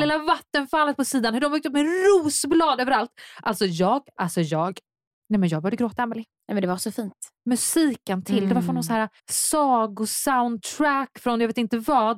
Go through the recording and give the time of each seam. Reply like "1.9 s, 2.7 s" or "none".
4.2 s, 9.2 s